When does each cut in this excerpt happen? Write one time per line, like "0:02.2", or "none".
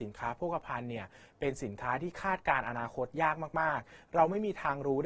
none